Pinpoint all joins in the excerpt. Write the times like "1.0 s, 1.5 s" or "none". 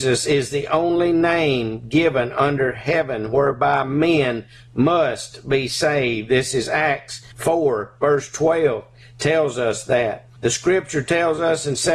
7.3 s, 10.4 s